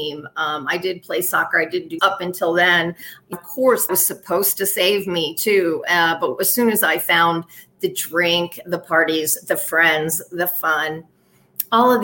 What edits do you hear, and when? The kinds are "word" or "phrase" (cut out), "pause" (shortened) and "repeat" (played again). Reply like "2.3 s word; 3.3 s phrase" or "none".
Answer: 2.0 s word; 3.3 s word; 3.9 s word